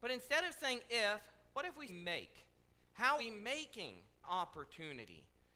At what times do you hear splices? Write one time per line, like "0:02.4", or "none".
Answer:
0:01.9
0:03.2
0:04.2